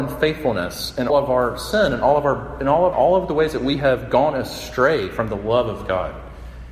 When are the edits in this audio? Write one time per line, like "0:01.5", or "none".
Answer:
0:01.1
0:02.9